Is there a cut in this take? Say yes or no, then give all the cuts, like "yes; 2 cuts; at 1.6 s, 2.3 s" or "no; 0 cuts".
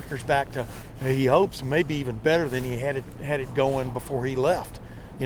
no; 0 cuts